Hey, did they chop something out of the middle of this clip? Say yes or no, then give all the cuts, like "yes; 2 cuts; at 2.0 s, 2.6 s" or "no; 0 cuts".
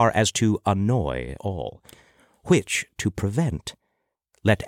yes; 1 cut; at 1.4 s